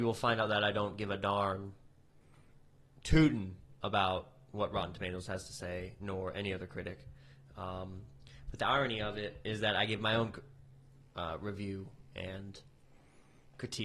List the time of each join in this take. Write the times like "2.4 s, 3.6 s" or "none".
none